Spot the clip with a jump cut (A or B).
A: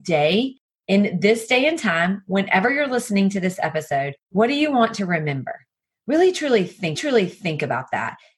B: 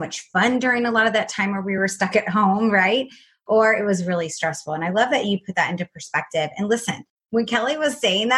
A